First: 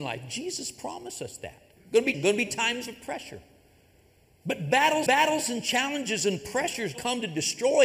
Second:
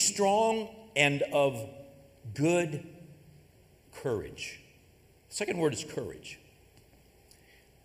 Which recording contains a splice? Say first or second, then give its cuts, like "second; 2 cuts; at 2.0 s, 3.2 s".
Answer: first; 4 cuts; at 1.8 s, 2.1 s, 5.1 s, 6.9 s